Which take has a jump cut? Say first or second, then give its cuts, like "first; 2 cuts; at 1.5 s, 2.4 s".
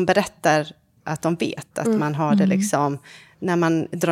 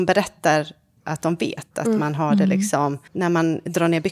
second; 1 cut; at 3.1 s